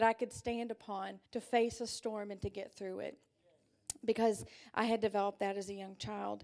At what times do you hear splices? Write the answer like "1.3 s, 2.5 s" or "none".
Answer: 1.3 s